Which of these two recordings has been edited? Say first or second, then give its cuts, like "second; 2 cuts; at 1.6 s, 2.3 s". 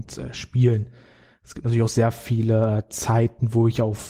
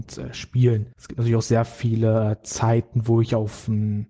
second; 1 cut; at 0.9 s